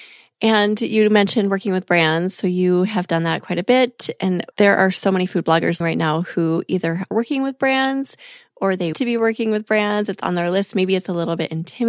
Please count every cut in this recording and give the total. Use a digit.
4